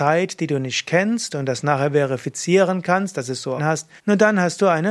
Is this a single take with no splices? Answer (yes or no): no